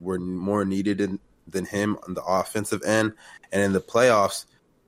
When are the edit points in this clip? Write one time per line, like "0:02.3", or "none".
none